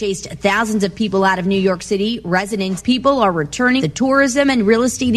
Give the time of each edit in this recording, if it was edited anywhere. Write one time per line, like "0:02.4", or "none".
0:02.8
0:03.8

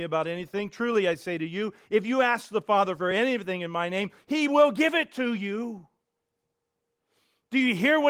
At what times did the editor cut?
none

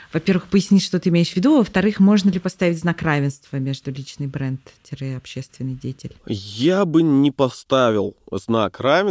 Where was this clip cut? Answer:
0:06.2

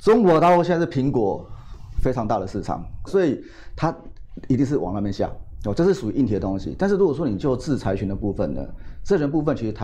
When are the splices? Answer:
0:03.1

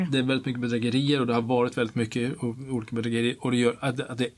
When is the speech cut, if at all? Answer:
none

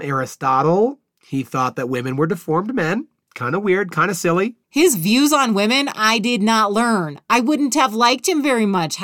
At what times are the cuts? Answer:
0:04.6

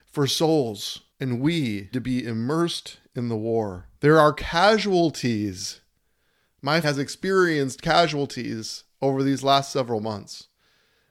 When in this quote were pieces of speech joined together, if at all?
0:01.1
0:01.9
0:04.0
0:06.8

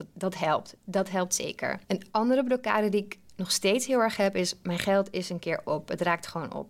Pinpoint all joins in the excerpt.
0:01.8

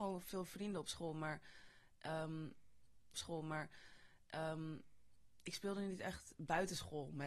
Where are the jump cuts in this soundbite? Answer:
0:03.1

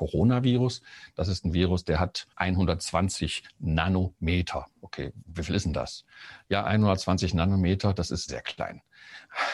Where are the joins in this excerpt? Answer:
0:02.3
0:04.7
0:06.6
0:08.3

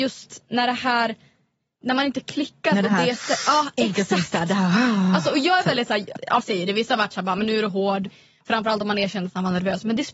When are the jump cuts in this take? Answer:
0:06.4

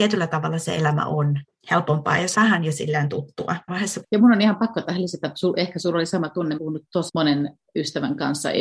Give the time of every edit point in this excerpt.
0:01.5
0:02.3
0:03.7
0:04.0
0:06.6
0:07.1

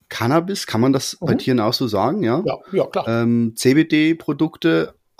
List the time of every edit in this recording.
none

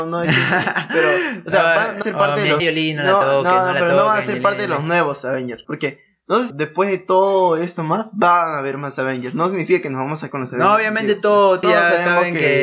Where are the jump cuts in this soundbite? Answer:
0:02.0
0:02.6
0:05.6
0:06.5
0:10.3
0:11.6

